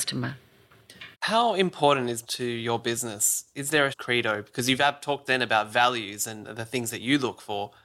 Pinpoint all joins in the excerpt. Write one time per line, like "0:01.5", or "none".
0:01.1
0:02.2
0:03.9
0:05.3